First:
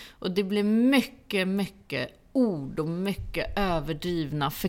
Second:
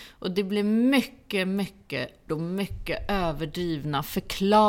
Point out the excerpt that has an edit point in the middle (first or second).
second